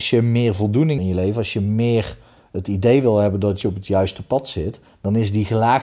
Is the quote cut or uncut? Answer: cut